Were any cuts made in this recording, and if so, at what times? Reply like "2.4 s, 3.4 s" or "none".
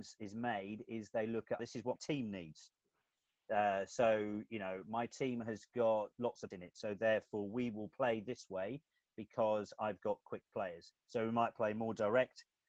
1.6 s, 2.0 s, 6.5 s